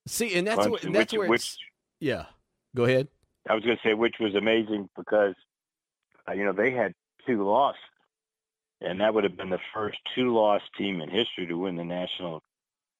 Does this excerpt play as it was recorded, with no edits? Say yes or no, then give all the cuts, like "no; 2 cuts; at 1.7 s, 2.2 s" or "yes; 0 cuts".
yes; 0 cuts